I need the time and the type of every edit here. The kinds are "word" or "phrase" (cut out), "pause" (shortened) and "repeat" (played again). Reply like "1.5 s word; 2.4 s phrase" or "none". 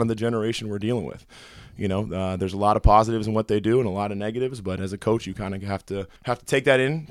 6.2 s pause